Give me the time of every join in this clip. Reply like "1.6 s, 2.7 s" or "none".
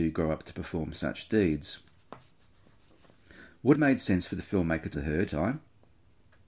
3.7 s, 4.9 s, 5.3 s

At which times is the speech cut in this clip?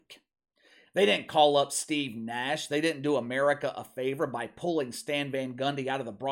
none

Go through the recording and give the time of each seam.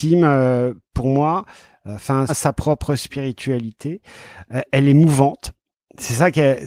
2.3 s

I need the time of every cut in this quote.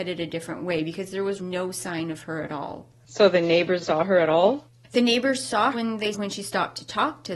1.4 s, 3.8 s, 5.7 s, 6.1 s

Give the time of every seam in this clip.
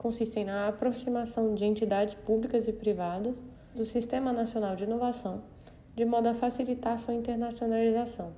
3.7 s

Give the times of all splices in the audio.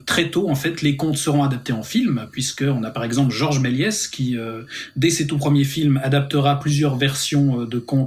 none

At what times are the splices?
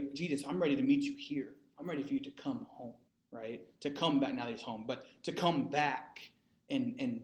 3.1 s

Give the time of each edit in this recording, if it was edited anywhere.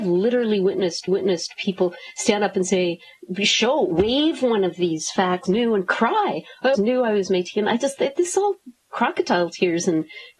1.1 s, 5.5 s, 6.7 s

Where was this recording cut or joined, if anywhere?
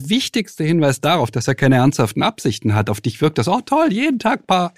none

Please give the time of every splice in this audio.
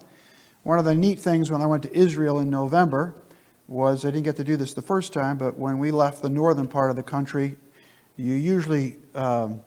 none

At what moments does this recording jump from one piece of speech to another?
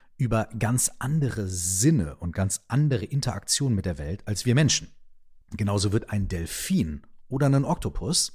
5.4 s

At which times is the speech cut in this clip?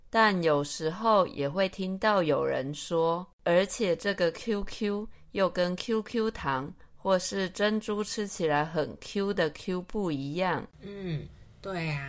3.3 s, 10.7 s

